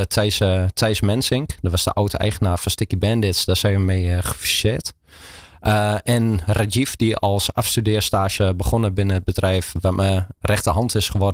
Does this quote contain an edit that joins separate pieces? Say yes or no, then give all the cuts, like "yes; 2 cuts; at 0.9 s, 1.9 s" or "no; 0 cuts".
yes; 1 cut; at 8.4 s